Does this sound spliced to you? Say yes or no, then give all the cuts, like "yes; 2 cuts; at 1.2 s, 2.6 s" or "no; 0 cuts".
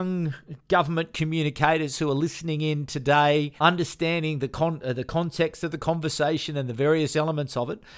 yes; 1 cut; at 3.6 s